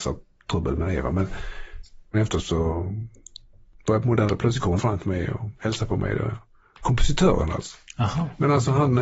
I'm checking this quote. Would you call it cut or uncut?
cut